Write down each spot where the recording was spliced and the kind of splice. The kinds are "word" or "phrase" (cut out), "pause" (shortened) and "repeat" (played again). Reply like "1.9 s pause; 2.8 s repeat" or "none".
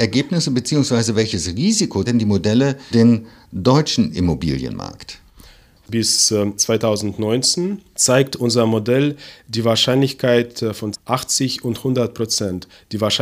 2.1 s word; 2.9 s word; 6.6 s word; 10.9 s word